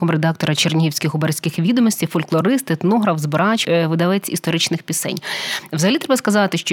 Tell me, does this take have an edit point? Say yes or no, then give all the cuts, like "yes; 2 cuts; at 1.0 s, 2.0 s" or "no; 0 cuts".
yes; 1 cut; at 3.6 s